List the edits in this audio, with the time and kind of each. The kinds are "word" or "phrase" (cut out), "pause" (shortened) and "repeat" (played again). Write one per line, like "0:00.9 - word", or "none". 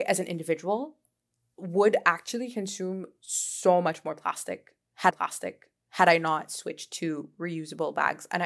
0:05.1 - repeat